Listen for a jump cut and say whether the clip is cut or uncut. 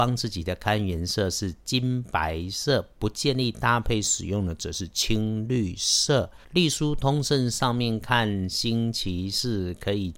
cut